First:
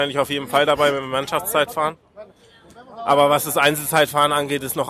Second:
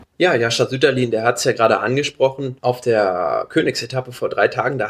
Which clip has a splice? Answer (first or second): second